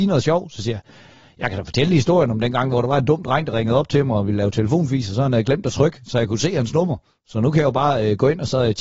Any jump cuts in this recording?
no; 0 cuts

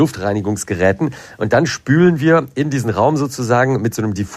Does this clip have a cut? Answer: no; 0 cuts

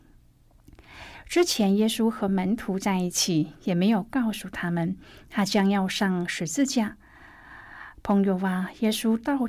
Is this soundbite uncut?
yes; 0 cuts

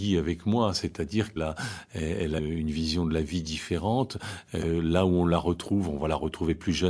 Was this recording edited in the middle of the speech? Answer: yes; 2 cuts; at 1.4 s, 2.4 s

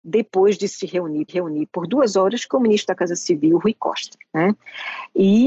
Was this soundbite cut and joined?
yes; 1 cut; at 1.3 s

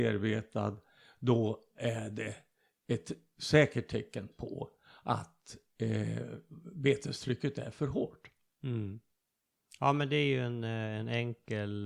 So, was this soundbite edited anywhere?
no; 0 cuts

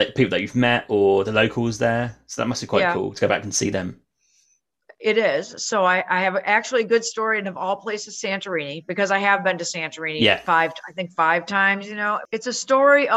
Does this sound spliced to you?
no; 0 cuts

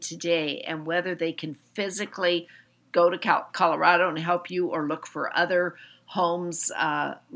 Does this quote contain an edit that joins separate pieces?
no; 0 cuts

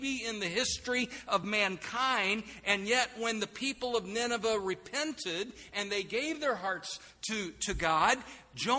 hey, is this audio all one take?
yes; 0 cuts

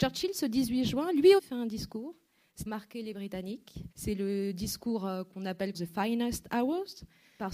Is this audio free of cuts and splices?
no; 4 cuts; at 1.4 s, 2.7 s, 3.9 s, 5.7 s

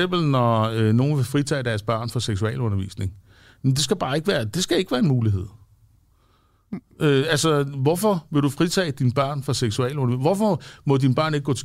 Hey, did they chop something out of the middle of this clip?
no; 0 cuts

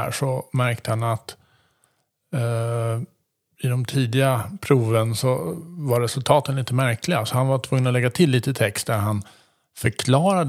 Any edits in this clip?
no; 0 cuts

